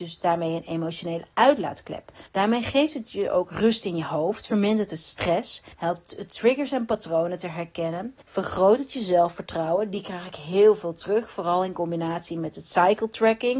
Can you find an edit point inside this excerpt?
yes; 3 cuts; at 2.3 s, 5.7 s, 8.2 s

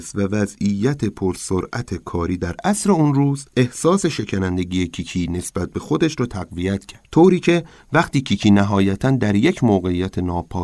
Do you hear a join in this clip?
yes; 2 cuts; at 3.5 s, 7.1 s

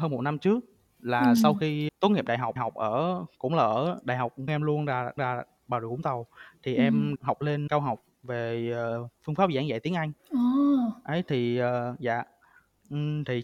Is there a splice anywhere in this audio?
yes; 8 cuts; at 1.9 s, 2.6 s, 4.5 s, 5.2 s, 7.2 s, 7.7 s, 8.1 s, 10.2 s

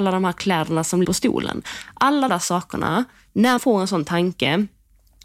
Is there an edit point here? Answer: yes; 3 cuts; at 1.0 s, 2.3 s, 3.6 s

